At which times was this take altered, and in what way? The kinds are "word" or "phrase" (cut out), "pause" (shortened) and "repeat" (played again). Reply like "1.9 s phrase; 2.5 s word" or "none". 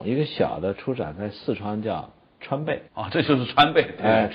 2.9 s pause